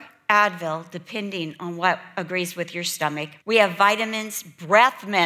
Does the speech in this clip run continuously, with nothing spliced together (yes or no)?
no